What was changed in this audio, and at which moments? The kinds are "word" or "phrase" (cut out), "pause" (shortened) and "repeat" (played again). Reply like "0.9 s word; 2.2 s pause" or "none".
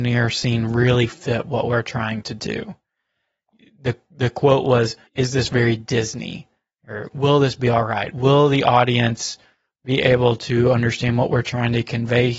5.1 s pause